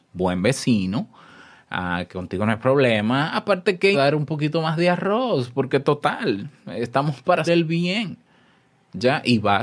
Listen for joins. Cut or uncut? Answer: cut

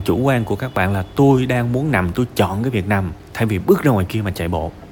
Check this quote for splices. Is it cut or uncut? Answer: uncut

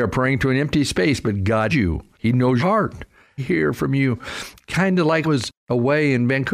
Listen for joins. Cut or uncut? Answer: cut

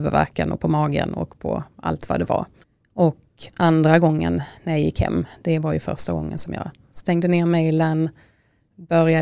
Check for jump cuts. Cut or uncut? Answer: cut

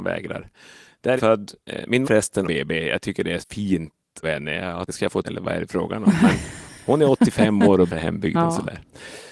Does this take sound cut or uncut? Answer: cut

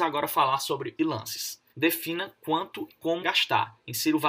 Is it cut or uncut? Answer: cut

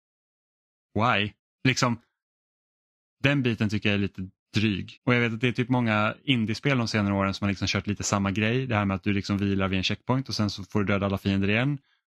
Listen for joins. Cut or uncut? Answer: cut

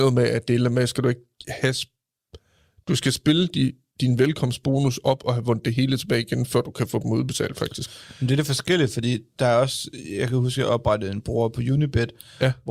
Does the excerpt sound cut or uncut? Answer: uncut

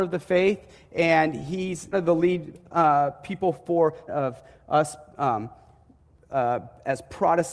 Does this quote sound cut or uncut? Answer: cut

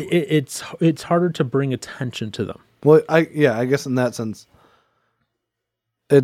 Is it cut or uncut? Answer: uncut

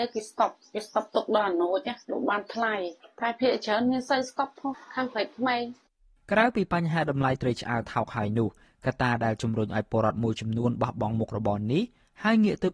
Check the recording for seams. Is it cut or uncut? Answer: uncut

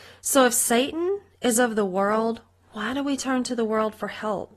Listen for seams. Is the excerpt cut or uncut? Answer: uncut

